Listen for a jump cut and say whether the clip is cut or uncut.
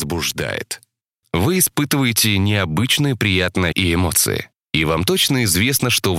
cut